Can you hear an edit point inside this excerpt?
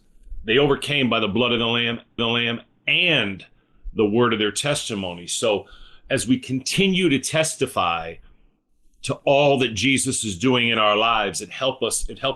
yes; 1 cut; at 2.2 s

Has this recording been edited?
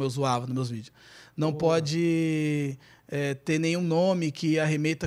no; 0 cuts

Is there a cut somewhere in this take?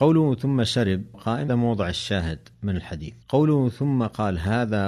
yes; 4 cuts; at 1.1 s, 1.5 s, 2.5 s, 3.2 s

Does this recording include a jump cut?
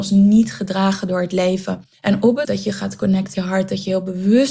yes; 3 cuts; at 1.9 s, 2.4 s, 3.3 s

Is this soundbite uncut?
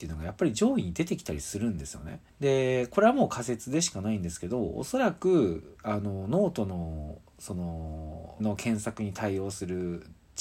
no; 2 cuts; at 2.3 s, 8.4 s

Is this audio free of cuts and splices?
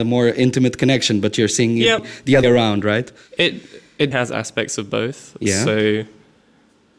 no; 3 cuts; at 2.0 s, 2.4 s, 4.1 s

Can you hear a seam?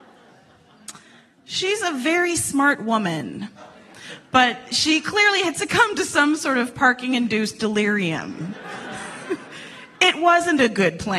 no; 0 cuts

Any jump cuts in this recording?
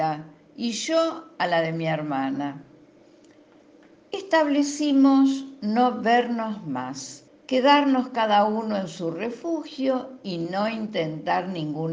yes; 1 cut; at 7.3 s

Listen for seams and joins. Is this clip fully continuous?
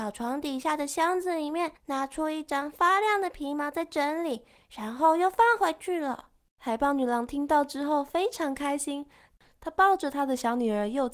no; 1 cut; at 1.8 s

